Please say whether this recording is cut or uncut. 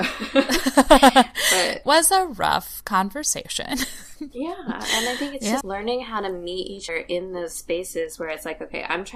cut